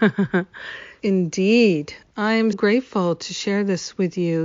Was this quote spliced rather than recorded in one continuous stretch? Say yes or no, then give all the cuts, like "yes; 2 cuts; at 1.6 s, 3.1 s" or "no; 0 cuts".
yes; 2 cuts; at 1.0 s, 2.5 s